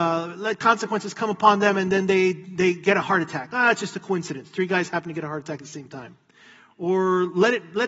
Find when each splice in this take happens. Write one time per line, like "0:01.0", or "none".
none